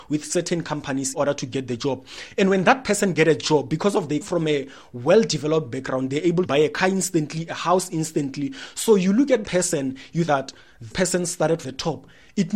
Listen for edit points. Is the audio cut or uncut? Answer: cut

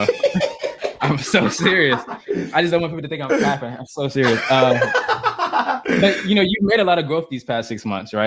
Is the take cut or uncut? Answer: uncut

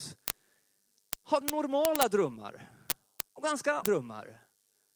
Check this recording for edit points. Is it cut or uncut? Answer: cut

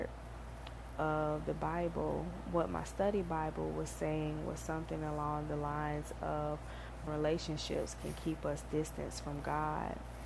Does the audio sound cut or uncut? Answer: cut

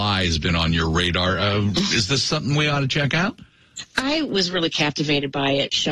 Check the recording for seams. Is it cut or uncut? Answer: uncut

